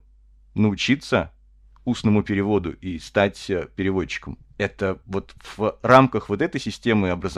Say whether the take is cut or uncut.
uncut